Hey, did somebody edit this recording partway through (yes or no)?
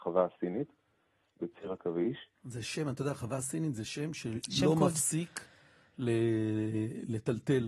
no